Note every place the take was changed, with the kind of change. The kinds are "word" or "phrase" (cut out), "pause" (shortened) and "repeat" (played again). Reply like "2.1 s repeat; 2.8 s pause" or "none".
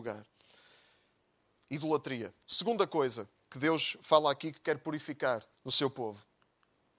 2.4 s pause; 5.5 s pause